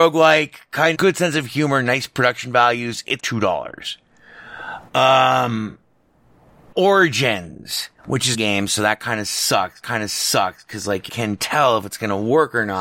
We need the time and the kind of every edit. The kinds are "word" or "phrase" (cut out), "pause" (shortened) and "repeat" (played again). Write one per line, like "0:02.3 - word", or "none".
0:00.9 - phrase
0:03.2 - word
0:06.7 - word
0:08.0 - pause
0:08.3 - phrase
0:09.8 - repeat
0:11.1 - phrase